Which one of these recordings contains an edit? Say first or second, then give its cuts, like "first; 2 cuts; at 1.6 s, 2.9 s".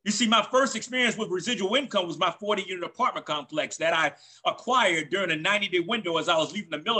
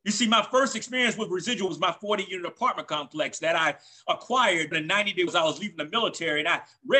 second; 3 cuts; at 1.7 s, 4.7 s, 5.3 s